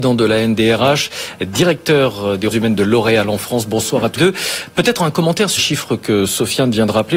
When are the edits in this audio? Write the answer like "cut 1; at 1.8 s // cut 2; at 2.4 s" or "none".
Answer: cut 1; at 2.5 s // cut 2; at 4.2 s // cut 3; at 5.0 s // cut 4; at 5.6 s